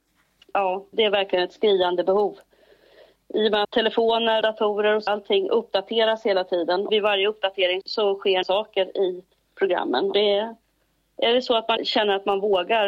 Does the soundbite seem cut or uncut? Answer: cut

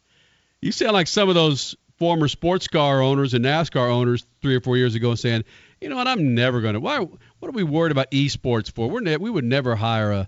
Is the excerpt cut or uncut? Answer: uncut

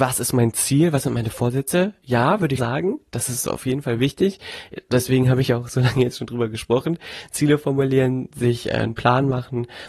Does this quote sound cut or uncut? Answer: cut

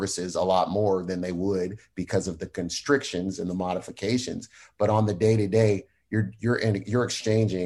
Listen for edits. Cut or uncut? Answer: uncut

